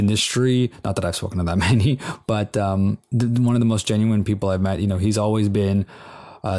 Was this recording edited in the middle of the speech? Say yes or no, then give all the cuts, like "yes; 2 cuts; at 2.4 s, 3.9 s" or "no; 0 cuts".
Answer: no; 0 cuts